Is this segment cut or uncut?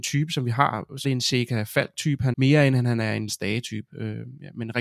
cut